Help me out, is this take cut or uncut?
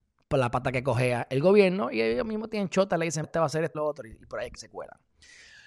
cut